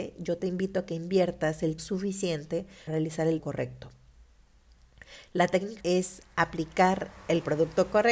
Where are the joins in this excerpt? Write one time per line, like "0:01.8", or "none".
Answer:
0:01.8
0:02.9
0:03.4
0:05.8